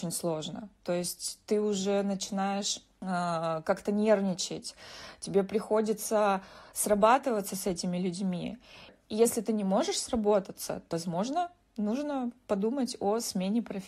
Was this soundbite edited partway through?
no; 0 cuts

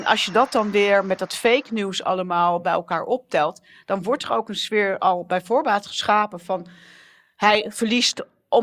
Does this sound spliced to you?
no; 0 cuts

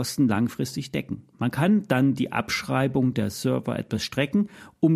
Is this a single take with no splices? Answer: no; 1 cut; at 1.3 s

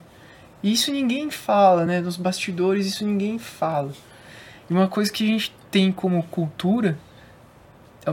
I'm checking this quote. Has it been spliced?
no; 0 cuts

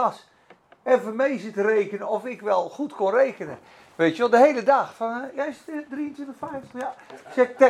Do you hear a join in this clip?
no; 0 cuts

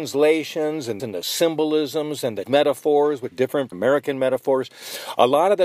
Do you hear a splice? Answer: yes; 4 cuts; at 1.0 s, 2.5 s, 3.3 s, 3.7 s

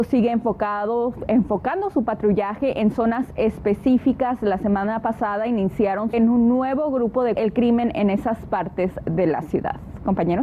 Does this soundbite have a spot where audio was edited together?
yes; 2 cuts; at 6.1 s, 7.4 s

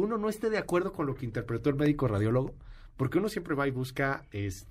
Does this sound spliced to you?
no; 0 cuts

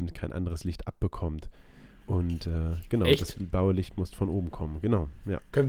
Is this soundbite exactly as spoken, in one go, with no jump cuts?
yes; 0 cuts

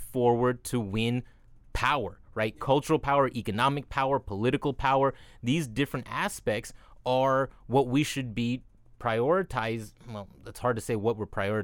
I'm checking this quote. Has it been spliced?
no; 0 cuts

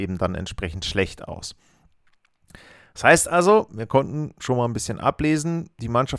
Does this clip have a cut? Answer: no; 0 cuts

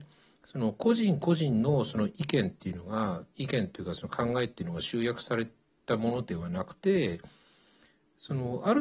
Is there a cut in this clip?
yes; 1 cut; at 6.8 s

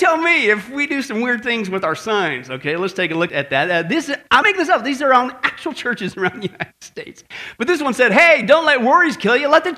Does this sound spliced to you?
yes; 2 cuts; at 3.3 s, 4.4 s

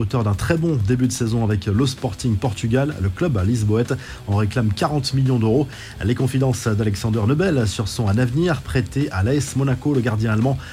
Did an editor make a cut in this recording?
no; 0 cuts

